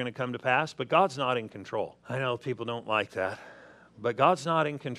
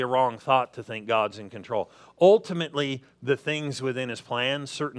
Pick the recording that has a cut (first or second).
first